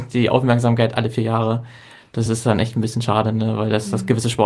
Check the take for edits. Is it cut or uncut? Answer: uncut